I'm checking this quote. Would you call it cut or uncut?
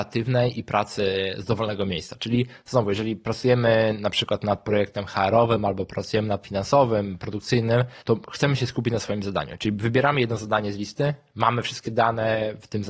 cut